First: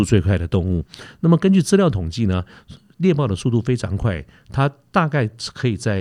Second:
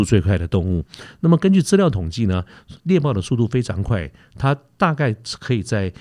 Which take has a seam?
second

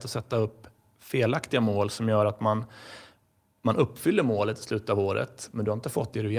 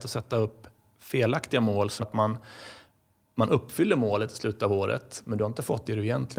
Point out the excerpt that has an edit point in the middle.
second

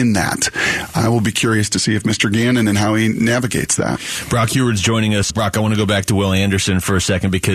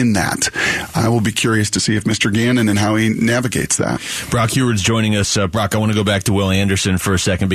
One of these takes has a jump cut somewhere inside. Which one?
first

